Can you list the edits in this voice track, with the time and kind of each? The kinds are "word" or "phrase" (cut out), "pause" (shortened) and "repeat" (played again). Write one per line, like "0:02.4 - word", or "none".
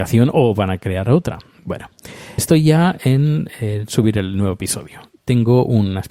0:02.4 - word